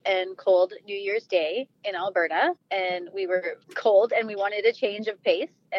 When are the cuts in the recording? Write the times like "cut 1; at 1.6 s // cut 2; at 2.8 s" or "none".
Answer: cut 1; at 2.6 s // cut 2; at 3.6 s